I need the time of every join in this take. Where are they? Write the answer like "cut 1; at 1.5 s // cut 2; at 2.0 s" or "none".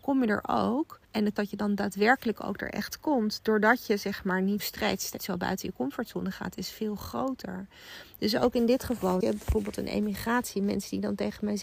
cut 1; at 1.0 s // cut 2; at 1.4 s // cut 3; at 4.6 s // cut 4; at 5.2 s // cut 5; at 9.2 s